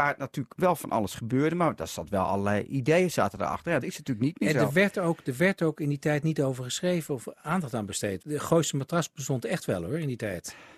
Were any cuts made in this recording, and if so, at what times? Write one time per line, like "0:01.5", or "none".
0:03.8
0:08.2